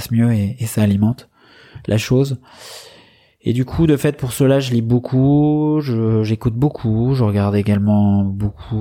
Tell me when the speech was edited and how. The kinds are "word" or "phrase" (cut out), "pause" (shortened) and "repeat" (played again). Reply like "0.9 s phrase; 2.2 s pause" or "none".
none